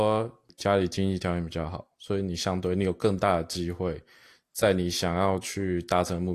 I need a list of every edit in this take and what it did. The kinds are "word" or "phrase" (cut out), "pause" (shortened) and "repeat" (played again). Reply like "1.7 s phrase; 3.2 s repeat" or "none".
none